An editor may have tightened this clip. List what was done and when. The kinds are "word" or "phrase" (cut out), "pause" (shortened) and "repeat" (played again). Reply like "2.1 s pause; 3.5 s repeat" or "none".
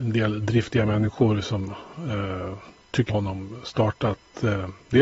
3.1 s word